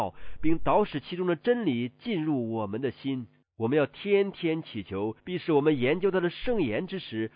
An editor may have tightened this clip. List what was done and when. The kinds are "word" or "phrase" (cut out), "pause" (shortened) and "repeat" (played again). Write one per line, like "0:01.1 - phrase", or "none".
0:03.4 - pause
0:05.2 - pause